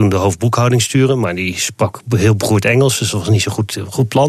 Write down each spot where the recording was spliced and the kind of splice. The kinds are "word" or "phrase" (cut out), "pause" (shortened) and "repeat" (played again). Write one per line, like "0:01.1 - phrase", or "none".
none